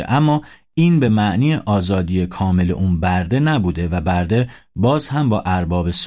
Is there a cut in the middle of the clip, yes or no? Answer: no